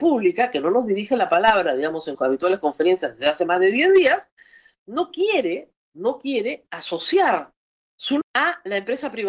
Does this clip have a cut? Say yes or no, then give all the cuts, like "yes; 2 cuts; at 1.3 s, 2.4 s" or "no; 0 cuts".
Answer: yes; 2 cuts; at 2.1 s, 8.2 s